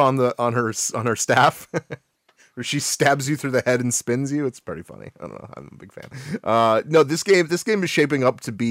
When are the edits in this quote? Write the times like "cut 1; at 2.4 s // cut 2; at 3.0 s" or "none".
none